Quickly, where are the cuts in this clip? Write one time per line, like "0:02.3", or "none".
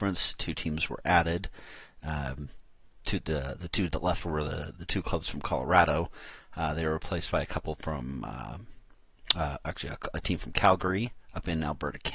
none